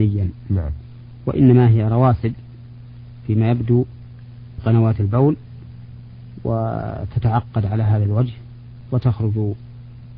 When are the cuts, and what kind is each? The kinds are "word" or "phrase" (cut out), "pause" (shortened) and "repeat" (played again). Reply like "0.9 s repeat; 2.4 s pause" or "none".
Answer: 4.6 s word